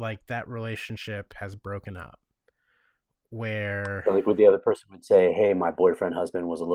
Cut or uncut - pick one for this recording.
uncut